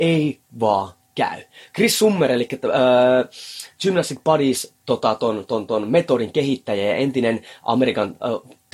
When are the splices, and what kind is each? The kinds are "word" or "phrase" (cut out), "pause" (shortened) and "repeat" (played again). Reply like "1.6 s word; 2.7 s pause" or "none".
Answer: none

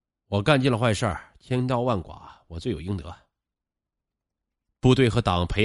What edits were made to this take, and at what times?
none

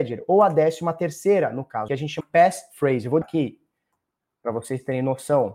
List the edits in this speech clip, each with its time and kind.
1.9 s phrase; 2.2 s word; 3.2 s word

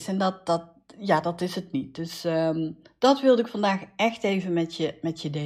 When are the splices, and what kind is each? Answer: none

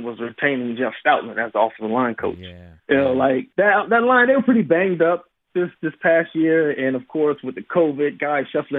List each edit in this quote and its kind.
2.8 s pause; 3.5 s pause

